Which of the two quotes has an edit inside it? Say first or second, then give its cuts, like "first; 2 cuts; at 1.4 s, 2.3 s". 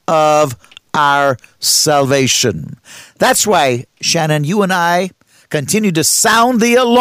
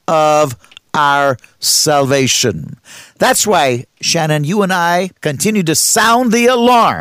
second; 1 cut; at 5.2 s